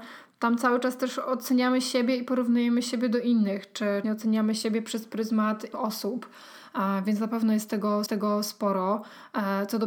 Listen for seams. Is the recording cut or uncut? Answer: cut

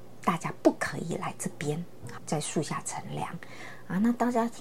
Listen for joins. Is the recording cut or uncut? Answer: cut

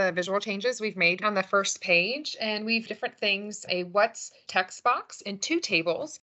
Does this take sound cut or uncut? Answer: cut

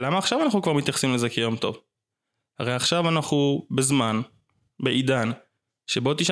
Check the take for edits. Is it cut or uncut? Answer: uncut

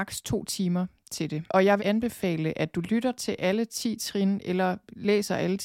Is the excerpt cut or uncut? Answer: cut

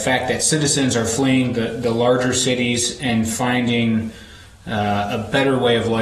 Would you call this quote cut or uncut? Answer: uncut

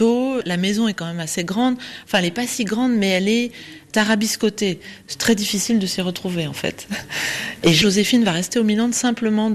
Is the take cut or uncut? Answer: uncut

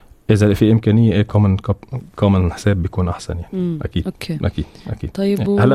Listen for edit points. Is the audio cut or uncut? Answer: uncut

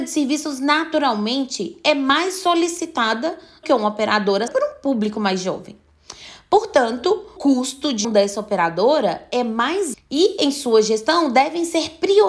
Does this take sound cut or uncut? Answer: cut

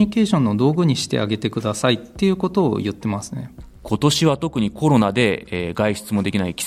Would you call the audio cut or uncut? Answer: uncut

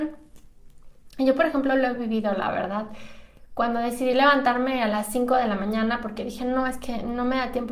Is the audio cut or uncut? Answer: uncut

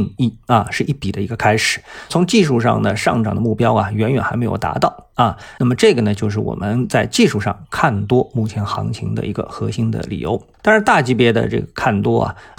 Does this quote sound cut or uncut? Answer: cut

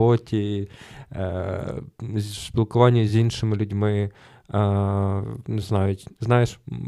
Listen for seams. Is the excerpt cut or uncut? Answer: uncut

